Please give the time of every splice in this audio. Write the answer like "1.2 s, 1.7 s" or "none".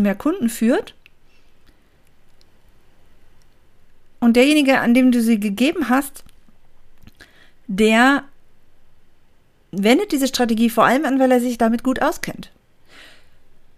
none